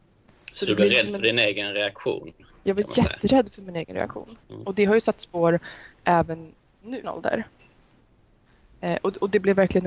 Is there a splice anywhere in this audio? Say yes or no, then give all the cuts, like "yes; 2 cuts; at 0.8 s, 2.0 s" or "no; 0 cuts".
yes; 2 cuts; at 4.4 s, 7.0 s